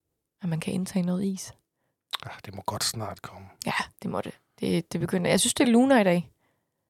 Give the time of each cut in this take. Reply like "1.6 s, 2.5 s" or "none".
none